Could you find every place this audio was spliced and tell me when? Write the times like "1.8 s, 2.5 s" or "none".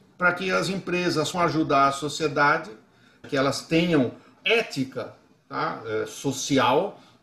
1.3 s, 3.2 s, 4.4 s